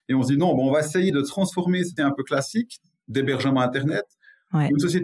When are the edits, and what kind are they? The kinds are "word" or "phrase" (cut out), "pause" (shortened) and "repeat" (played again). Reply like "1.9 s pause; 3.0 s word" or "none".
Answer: 2.0 s word